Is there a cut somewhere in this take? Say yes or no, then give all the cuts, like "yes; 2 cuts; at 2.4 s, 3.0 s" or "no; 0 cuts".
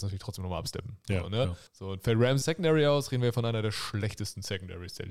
yes; 2 cuts; at 1.7 s, 2.4 s